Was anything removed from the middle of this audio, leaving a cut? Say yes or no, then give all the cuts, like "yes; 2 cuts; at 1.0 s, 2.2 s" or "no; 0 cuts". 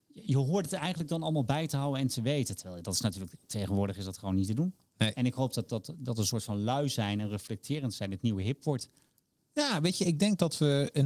no; 0 cuts